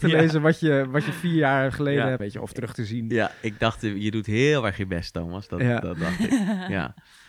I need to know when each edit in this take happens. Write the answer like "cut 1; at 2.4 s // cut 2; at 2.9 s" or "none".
cut 1; at 2.2 s